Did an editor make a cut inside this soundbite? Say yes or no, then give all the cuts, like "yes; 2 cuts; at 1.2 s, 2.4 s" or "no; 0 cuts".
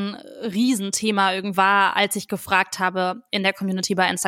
yes; 1 cut; at 1.5 s